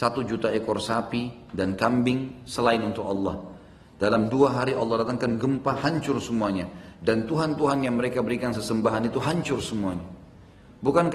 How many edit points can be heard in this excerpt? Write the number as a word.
zero